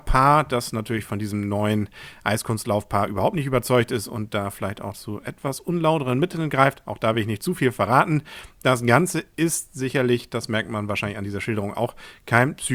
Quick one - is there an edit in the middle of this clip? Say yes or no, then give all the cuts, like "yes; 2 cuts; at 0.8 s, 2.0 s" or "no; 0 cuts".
no; 0 cuts